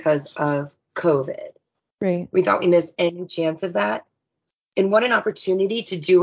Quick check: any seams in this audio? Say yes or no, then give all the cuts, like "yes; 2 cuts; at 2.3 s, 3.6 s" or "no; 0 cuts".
no; 0 cuts